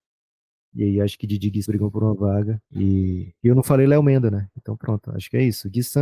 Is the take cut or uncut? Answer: cut